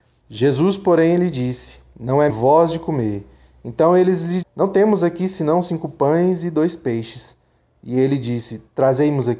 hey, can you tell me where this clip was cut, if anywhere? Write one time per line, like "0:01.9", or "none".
0:02.3
0:04.4